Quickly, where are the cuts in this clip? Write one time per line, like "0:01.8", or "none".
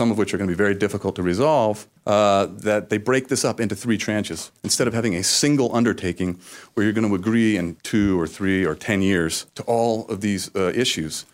0:02.0
0:04.6
0:07.8
0:09.5